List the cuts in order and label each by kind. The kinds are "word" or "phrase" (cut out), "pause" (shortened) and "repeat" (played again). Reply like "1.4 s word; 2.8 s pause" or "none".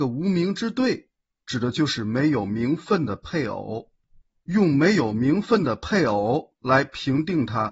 none